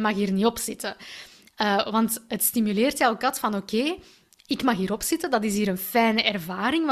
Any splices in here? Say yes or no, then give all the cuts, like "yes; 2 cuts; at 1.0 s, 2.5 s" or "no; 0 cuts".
no; 0 cuts